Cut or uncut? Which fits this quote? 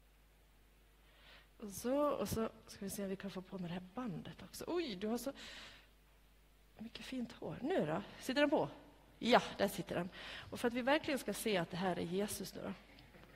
uncut